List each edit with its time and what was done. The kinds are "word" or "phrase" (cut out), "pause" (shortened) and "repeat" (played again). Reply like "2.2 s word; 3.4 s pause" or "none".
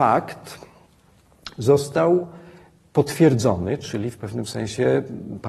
none